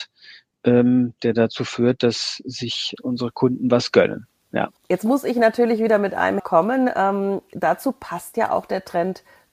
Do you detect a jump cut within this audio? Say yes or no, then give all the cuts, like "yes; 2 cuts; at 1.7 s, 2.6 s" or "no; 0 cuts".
yes; 3 cuts; at 3.0 s, 4.8 s, 6.4 s